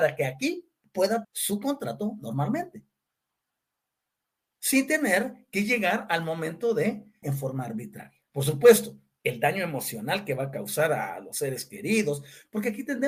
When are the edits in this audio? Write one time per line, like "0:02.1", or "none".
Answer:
0:01.2
0:07.2
0:08.3